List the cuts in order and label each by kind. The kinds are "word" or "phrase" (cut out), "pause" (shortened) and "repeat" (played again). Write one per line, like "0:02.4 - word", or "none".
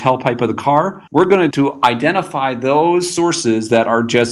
0:01.1 - pause
0:01.5 - word

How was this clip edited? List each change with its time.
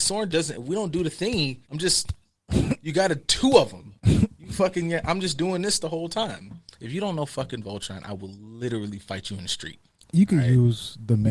0:01.6 - pause

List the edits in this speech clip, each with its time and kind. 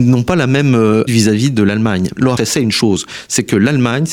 0:01.1 - word
0:02.4 - word

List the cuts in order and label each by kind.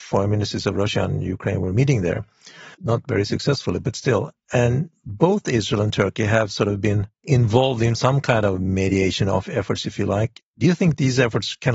0:02.7 - pause

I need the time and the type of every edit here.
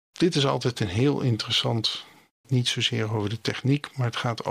0:02.4 - phrase

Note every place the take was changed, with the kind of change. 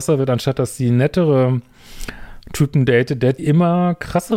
0:03.4 - word

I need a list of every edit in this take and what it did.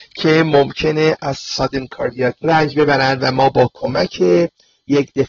0:02.4 - word

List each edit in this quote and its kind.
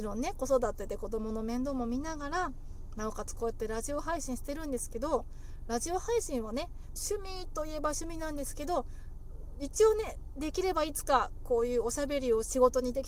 0:07.0 - phrase

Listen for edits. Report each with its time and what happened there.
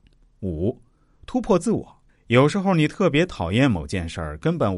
0:02.1 - pause

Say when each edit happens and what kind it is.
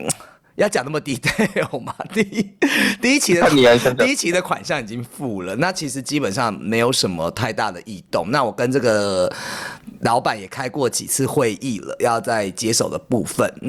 none

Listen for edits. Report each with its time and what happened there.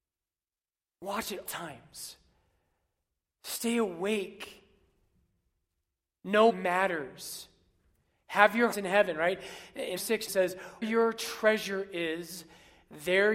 0:01.5 - word
0:06.5 - word
0:08.7 - word
0:10.0 - word
0:10.3 - word
0:10.8 - word

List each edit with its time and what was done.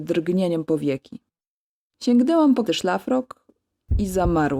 0:02.7 - word

